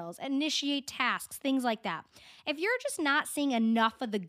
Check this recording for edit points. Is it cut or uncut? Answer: uncut